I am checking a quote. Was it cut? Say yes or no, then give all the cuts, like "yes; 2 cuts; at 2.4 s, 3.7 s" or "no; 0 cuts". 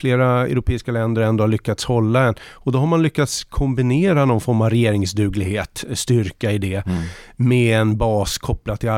no; 0 cuts